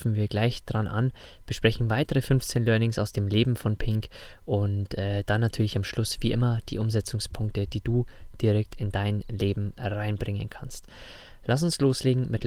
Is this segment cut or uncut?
uncut